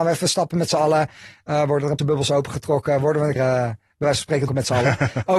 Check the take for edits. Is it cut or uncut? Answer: cut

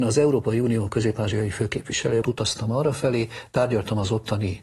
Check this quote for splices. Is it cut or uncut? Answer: cut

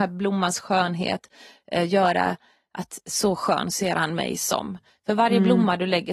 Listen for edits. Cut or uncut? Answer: uncut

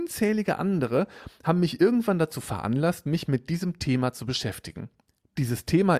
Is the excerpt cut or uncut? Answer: uncut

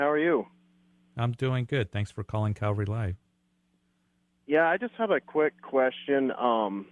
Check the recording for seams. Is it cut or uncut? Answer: uncut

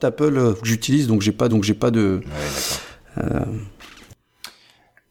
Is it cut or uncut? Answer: cut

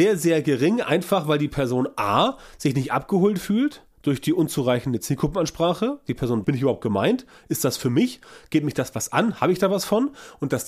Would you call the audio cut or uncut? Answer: cut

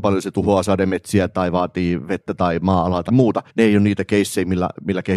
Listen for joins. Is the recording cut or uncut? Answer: cut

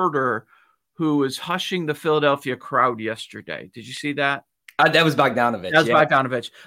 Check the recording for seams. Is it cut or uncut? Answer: cut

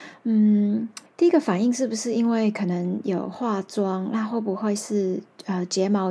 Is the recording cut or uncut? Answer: cut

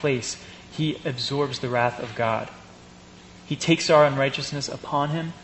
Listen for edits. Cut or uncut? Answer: uncut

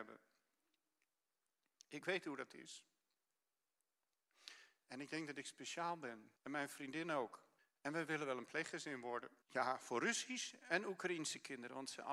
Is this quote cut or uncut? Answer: cut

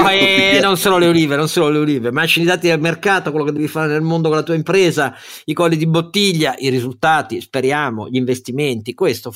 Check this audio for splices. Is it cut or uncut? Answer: uncut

